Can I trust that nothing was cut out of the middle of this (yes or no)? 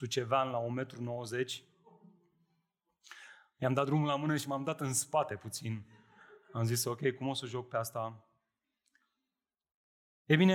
yes